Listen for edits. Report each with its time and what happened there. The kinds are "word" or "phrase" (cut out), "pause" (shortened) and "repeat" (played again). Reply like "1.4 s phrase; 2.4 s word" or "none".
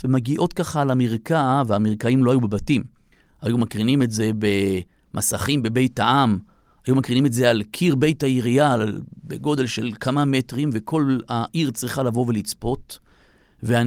none